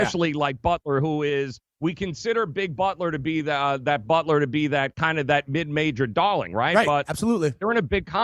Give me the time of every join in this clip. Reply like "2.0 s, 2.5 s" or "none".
none